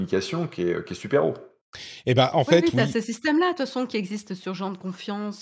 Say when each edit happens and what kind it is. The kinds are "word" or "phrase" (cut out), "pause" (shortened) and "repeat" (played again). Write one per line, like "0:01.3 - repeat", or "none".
none